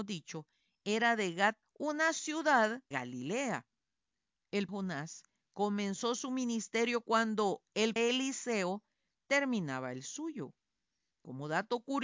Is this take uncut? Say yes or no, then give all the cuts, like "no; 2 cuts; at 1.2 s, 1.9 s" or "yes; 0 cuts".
no; 4 cuts; at 1.6 s, 2.9 s, 4.7 s, 8.0 s